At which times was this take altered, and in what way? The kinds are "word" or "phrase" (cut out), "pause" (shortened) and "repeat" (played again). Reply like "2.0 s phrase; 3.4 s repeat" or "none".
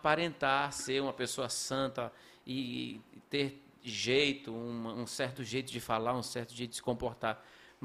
none